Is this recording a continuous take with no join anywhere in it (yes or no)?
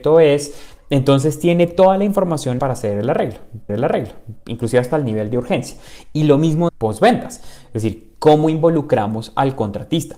no